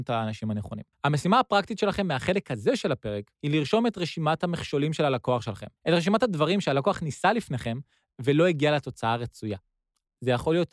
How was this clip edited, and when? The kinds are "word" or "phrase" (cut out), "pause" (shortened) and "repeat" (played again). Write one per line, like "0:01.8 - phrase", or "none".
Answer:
0:00.9 - pause
0:03.4 - pause
0:05.8 - pause